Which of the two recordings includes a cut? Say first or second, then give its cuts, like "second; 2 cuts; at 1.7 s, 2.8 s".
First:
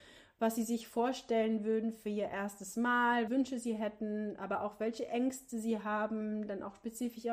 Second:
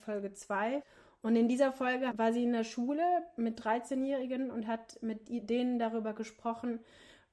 first; 1 cut; at 3.3 s